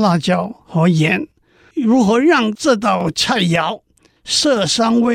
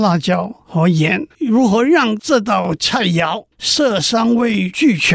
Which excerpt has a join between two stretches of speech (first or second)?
second